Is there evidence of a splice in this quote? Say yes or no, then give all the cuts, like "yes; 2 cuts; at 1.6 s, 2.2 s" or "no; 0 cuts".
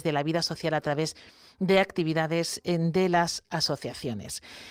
no; 0 cuts